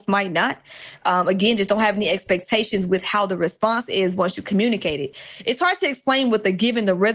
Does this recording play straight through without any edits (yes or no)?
yes